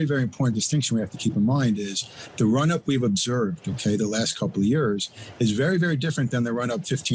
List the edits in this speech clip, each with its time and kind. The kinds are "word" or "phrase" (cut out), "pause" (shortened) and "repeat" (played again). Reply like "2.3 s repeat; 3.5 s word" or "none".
none